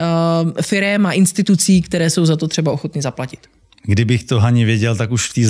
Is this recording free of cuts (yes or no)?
yes